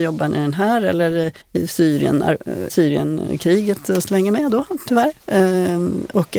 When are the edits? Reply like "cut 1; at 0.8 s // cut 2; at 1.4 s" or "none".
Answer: cut 1; at 1.4 s // cut 2; at 2.7 s // cut 3; at 4.0 s